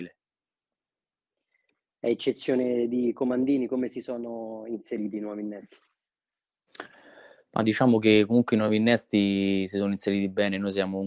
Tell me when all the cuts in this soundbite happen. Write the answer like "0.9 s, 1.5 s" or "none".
none